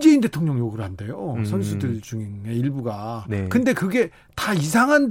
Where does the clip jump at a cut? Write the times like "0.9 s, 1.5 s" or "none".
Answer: none